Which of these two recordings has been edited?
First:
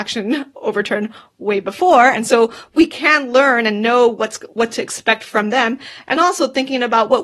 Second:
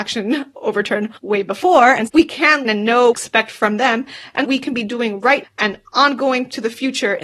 second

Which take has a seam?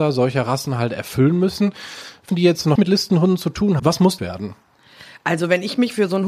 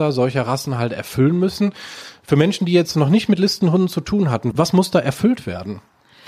first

